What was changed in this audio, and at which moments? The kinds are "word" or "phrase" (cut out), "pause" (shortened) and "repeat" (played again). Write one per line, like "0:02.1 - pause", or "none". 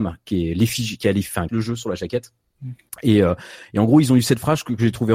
0:01.5 - phrase